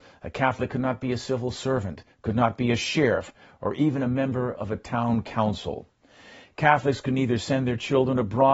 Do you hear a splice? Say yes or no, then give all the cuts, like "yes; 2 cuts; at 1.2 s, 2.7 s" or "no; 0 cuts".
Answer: no; 0 cuts